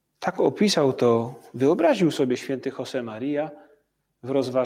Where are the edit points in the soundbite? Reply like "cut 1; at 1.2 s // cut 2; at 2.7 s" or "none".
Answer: none